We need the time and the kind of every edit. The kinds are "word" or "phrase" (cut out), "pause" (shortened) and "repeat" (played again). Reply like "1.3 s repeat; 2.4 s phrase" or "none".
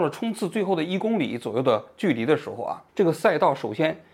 2.9 s pause

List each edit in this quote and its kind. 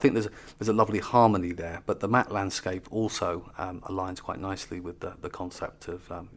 none

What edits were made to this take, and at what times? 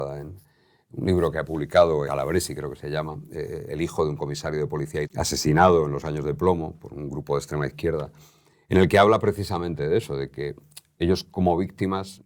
2.0 s word; 3.7 s word; 5.0 s word

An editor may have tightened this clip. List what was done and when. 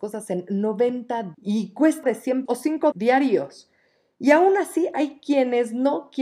1.3 s word; 2.0 s word; 2.5 s word; 2.9 s word

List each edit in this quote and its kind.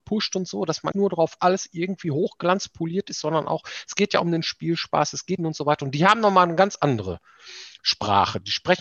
0.9 s word; 1.4 s phrase; 5.4 s phrase

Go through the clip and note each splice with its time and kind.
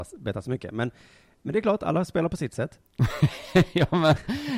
none

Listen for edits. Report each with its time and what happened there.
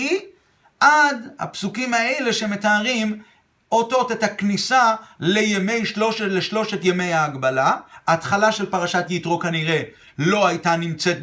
none

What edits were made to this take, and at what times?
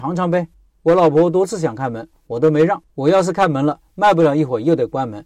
2.9 s pause

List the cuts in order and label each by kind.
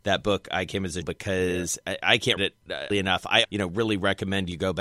1.0 s word; 2.4 s word; 2.9 s word; 3.4 s word

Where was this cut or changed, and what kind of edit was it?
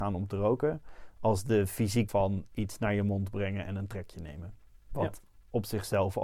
2.1 s word

